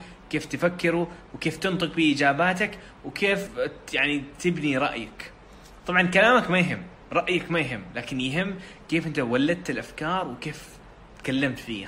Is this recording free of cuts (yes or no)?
yes